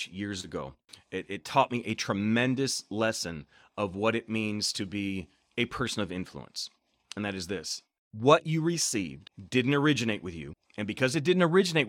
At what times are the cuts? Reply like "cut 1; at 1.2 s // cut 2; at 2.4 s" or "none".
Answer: none